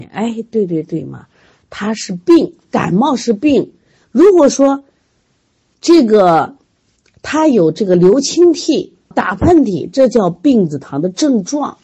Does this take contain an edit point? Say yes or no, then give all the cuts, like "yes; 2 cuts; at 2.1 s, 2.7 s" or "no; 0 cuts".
yes; 1 cut; at 9.1 s